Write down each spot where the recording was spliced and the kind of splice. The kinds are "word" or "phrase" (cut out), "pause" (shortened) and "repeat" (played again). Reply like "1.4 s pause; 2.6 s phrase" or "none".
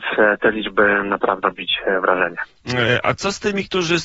1.4 s word